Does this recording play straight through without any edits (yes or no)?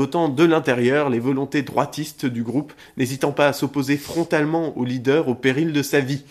yes